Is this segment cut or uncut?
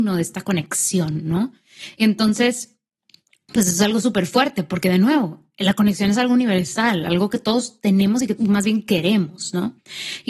cut